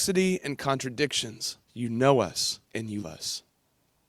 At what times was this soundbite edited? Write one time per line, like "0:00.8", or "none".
0:01.6
0:02.7
0:03.0